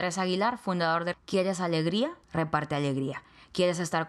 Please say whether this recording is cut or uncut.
cut